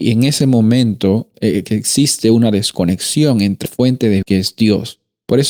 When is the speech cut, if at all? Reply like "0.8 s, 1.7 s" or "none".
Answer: 1.3 s, 3.7 s, 4.2 s